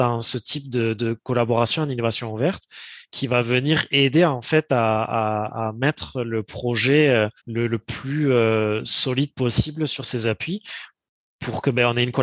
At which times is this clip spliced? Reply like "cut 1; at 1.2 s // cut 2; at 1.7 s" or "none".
cut 1; at 7.4 s